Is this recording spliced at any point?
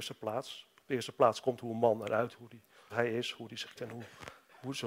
yes; 3 cuts; at 2.3 s, 2.9 s, 3.8 s

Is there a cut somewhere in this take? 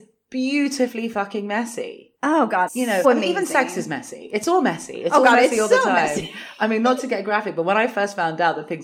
yes; 3 cuts; at 2.2 s, 2.7 s, 3.0 s

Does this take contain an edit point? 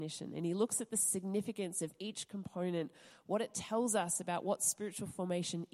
no; 0 cuts

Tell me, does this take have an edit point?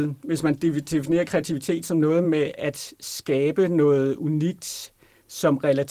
no; 0 cuts

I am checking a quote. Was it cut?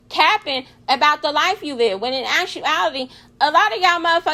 no; 0 cuts

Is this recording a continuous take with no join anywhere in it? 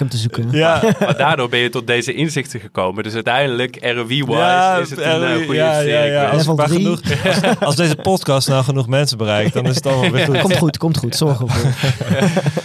yes; 0 cuts

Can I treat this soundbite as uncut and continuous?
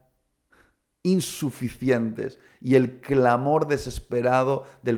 yes; 0 cuts

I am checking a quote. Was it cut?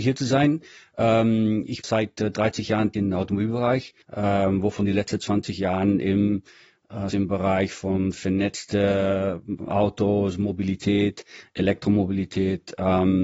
yes; 5 cuts; at 1.8 s, 2.9 s, 4.0 s, 7.1 s, 9.6 s

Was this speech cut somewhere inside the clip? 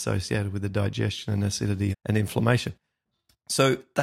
yes; 1 cut; at 1.9 s

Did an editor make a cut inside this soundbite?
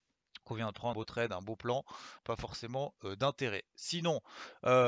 yes; 2 cuts; at 0.9 s, 2.2 s

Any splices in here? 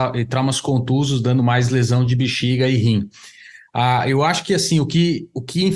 no; 0 cuts

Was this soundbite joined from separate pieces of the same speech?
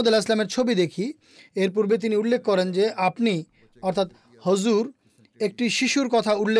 no; 0 cuts

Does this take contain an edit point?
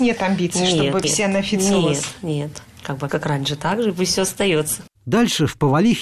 yes; 2 cuts; at 1.0 s, 3.1 s

